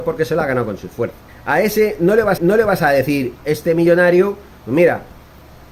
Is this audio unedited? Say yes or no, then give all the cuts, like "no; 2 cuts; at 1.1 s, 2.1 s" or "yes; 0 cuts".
no; 3 cuts; at 1.3 s, 2.4 s, 3.4 s